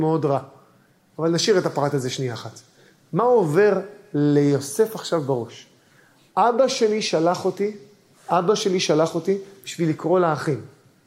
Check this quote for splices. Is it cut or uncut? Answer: uncut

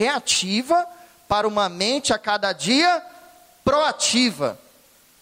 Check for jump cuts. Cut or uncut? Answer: uncut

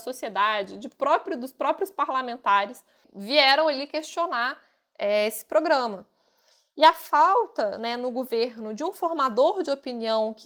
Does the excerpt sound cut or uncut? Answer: uncut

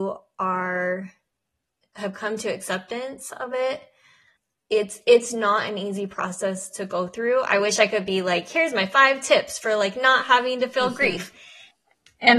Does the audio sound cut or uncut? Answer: uncut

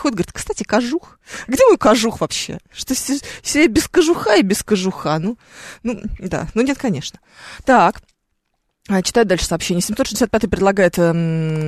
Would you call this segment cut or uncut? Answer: uncut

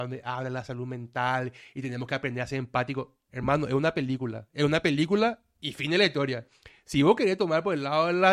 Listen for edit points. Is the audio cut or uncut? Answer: uncut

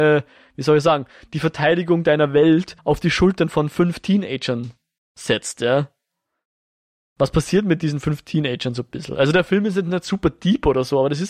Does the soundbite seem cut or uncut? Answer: cut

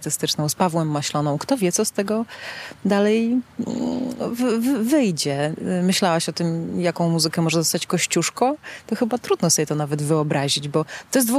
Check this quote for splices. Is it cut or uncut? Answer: uncut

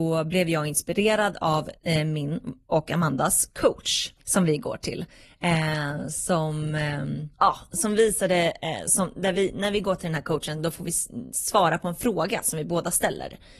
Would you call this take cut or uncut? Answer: cut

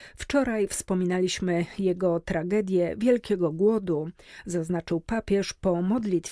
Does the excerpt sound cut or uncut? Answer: uncut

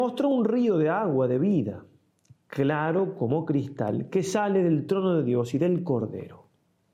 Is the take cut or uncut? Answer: uncut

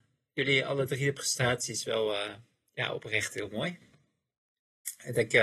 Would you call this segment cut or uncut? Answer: uncut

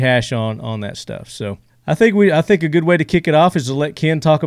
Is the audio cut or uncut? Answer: cut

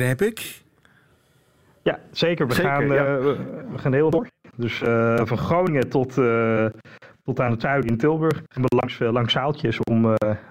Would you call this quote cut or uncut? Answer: cut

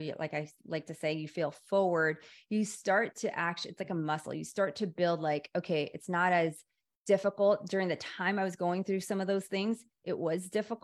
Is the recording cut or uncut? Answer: uncut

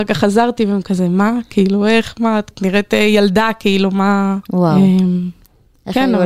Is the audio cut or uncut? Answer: cut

